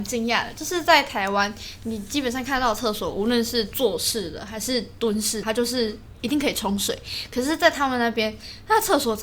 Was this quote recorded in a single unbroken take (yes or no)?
no